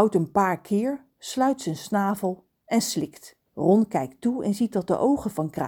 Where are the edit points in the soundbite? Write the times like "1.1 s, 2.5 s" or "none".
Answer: 3.5 s